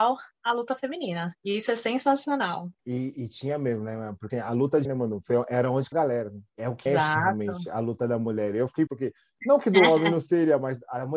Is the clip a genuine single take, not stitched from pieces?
no; 7 cuts; at 2.8 s, 4.3 s, 4.8 s, 5.9 s, 6.5 s, 6.9 s, 8.9 s

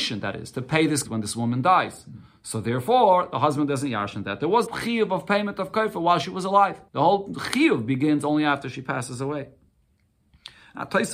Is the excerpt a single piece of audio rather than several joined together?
no; 3 cuts; at 1.0 s, 4.7 s, 6.9 s

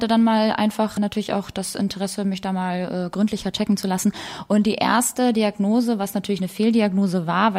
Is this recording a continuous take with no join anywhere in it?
no; 1 cut; at 1.0 s

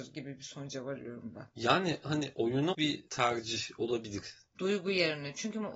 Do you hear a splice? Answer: yes; 2 cuts; at 2.0 s, 2.7 s

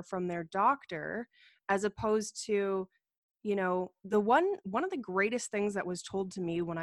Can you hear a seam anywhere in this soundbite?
no; 0 cuts

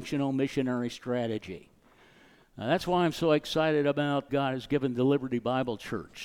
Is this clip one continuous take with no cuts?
no; 1 cut; at 4.3 s

